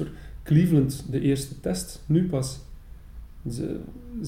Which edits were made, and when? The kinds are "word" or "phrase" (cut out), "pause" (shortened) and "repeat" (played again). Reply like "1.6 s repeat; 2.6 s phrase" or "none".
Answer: none